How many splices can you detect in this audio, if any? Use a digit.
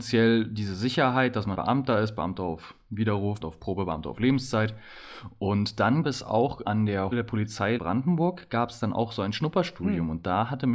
6